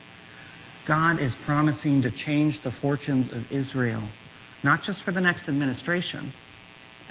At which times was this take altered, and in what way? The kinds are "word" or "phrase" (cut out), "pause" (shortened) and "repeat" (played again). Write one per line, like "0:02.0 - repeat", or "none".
none